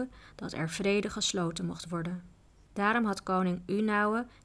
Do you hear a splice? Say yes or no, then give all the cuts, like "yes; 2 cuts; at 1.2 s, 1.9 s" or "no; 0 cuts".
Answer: no; 0 cuts